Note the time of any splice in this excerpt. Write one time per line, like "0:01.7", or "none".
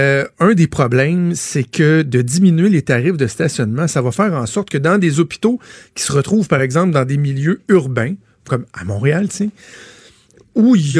none